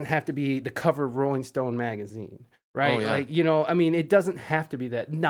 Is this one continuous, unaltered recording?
yes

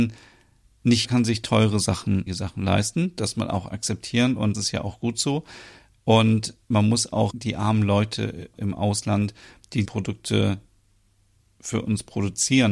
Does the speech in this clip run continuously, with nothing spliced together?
no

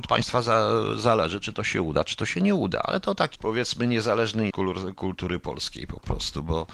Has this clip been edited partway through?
yes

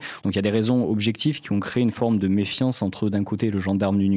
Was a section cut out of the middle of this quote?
no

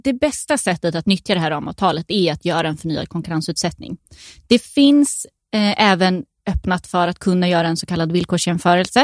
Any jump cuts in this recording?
no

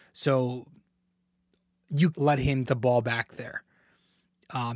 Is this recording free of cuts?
no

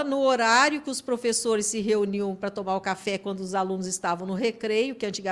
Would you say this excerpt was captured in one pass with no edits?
yes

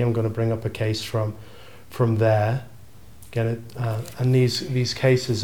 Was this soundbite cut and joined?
no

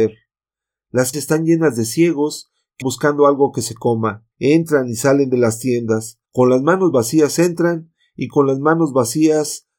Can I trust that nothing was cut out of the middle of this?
no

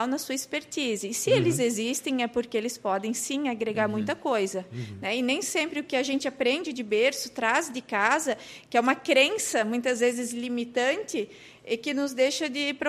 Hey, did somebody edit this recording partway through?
no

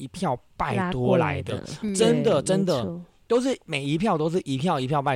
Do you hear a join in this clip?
no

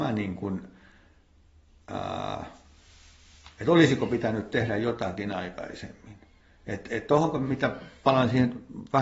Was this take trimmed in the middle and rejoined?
no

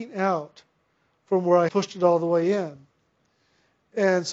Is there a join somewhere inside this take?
yes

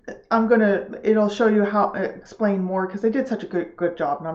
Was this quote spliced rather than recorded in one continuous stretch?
no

